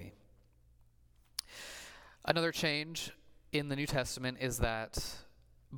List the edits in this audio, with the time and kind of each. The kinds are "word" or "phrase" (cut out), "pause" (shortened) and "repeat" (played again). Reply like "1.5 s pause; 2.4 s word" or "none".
none